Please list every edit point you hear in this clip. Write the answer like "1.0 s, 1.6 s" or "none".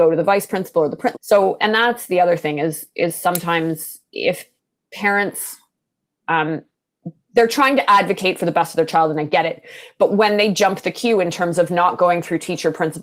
1.1 s, 1.6 s